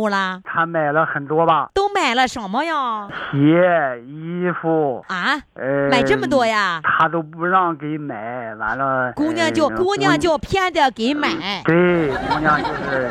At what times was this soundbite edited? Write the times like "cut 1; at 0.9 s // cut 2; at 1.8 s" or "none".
cut 1; at 9.7 s